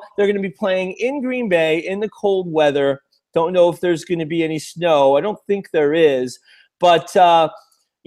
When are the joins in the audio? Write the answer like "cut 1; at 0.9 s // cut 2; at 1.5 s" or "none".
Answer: none